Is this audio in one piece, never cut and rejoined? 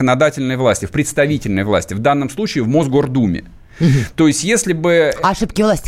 yes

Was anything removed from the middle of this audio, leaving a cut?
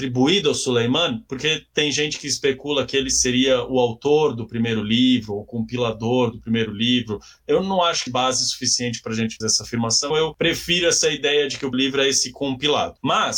yes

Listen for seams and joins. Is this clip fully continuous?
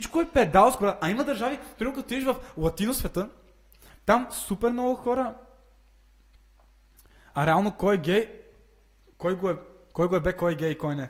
yes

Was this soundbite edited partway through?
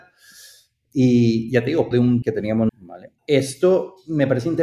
yes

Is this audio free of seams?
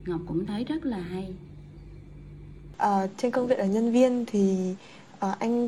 yes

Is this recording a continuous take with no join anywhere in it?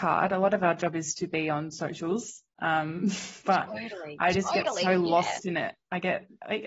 yes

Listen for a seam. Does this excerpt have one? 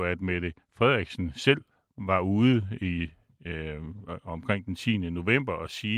no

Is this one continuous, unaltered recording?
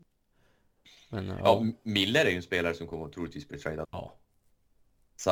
no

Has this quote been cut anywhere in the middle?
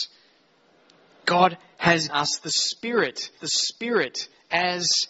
yes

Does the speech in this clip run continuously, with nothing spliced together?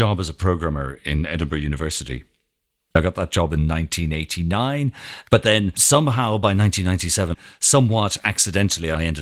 yes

